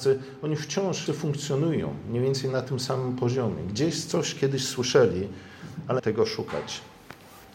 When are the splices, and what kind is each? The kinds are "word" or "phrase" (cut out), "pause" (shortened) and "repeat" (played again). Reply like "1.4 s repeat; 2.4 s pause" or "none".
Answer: 1.1 s word; 6.0 s phrase